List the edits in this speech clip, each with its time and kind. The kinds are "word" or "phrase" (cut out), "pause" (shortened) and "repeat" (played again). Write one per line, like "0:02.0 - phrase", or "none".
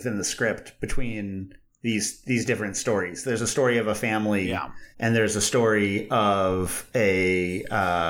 0:04.9 - pause